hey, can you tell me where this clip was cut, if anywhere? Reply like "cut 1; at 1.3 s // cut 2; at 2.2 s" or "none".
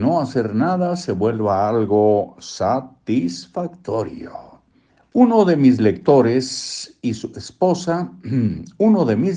cut 1; at 4.9 s